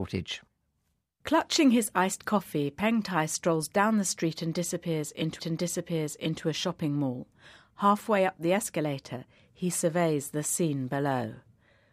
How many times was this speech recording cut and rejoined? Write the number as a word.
one